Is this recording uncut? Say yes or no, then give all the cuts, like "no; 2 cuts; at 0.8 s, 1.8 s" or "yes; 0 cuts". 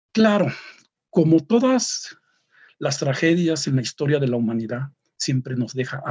yes; 0 cuts